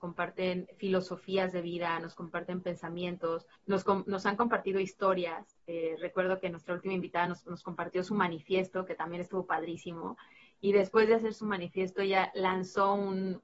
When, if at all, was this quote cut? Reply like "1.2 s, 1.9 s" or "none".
none